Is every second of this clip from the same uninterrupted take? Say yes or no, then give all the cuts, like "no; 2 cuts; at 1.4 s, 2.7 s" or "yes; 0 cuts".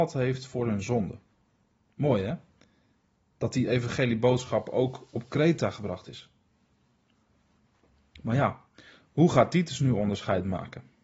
yes; 0 cuts